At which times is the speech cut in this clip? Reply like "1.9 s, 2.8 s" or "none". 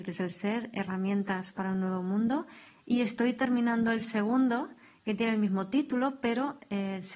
none

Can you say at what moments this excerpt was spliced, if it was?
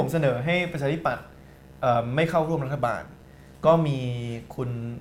none

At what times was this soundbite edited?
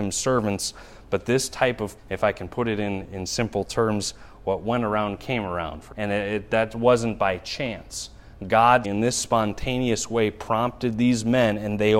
2.0 s, 3.0 s, 5.9 s, 8.8 s

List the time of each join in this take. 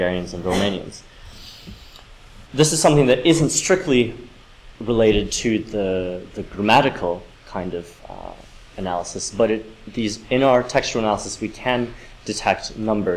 2.5 s

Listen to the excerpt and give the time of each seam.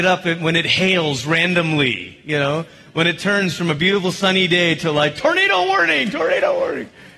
none

